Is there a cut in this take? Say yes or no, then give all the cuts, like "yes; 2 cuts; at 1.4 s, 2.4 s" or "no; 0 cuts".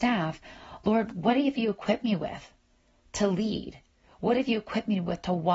no; 0 cuts